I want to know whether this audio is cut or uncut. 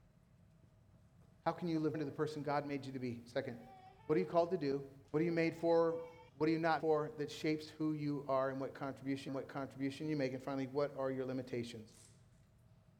cut